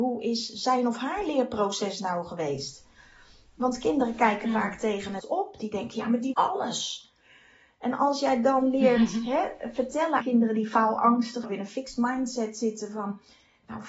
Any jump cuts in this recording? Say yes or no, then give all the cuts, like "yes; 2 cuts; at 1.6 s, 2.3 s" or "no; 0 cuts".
yes; 4 cuts; at 5.2 s, 6.3 s, 10.2 s, 11.4 s